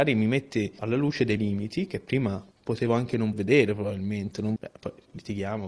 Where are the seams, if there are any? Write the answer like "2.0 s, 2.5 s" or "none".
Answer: 1.4 s, 3.3 s, 4.6 s